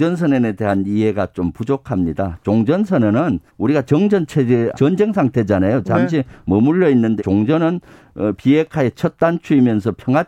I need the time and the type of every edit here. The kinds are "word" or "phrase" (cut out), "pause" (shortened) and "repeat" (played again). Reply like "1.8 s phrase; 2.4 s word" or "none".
3.5 s pause; 4.7 s word; 7.2 s word

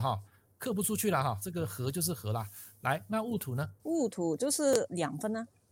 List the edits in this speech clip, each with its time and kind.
3.8 s pause

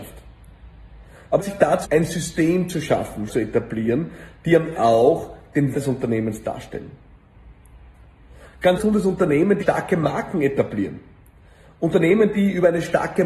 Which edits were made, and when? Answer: 1.4 s word; 1.8 s word; 3.3 s word; 4.7 s word; 5.7 s word; 8.8 s word; 9.6 s word

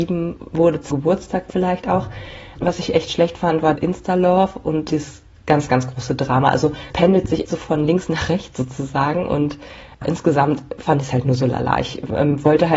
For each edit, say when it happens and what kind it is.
0.9 s word; 3.8 s word; 4.9 s word; 6.9 s word; 7.5 s word; 10.0 s word

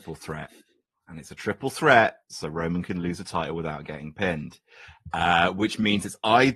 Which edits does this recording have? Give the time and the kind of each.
2.2 s pause

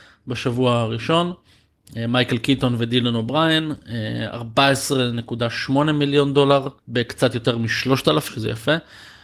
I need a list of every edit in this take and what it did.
6.8 s pause; 8.3 s word

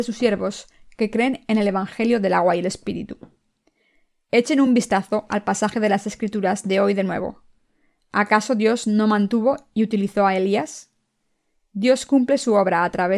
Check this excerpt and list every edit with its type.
none

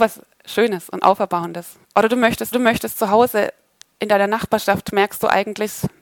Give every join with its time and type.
1.8 s pause; 2.5 s repeat

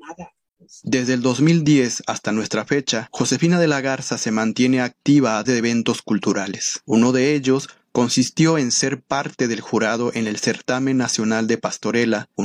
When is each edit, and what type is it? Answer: 5.4 s word

